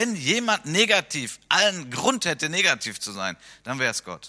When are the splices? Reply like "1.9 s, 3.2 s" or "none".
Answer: none